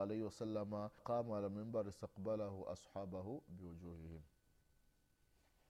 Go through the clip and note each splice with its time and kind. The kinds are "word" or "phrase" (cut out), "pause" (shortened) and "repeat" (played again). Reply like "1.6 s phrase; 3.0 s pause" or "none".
1.0 s word

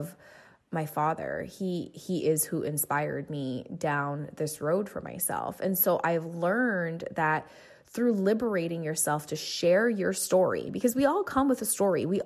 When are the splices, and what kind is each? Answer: none

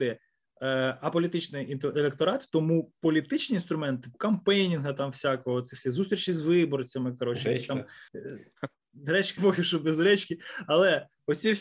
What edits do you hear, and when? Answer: 4.1 s word; 8.1 s pause; 9.4 s word

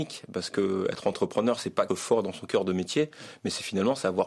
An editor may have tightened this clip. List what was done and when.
1.9 s phrase

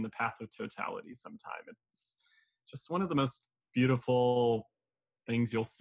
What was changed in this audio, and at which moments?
none

